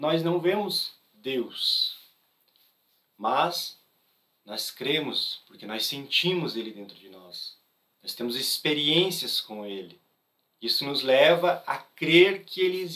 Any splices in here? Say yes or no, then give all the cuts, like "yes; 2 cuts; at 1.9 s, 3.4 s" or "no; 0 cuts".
yes; 1 cut; at 10.1 s